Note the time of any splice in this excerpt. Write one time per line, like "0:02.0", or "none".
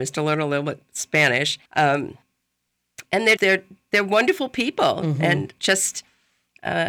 0:01.7
0:03.4
0:05.6